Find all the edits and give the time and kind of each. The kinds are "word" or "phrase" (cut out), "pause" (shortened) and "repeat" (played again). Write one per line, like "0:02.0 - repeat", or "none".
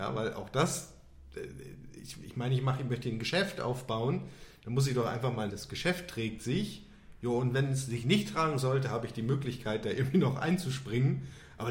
0:05.5 - phrase